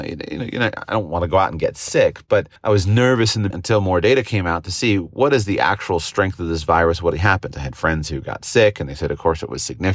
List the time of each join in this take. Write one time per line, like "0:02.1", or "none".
0:02.6
0:03.5
0:07.1